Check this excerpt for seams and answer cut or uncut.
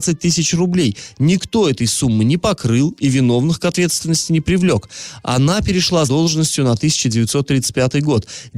cut